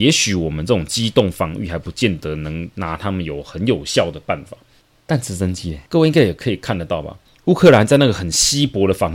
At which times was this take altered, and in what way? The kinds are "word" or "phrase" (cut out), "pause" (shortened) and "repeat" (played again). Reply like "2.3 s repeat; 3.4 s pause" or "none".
5.9 s pause; 7.3 s pause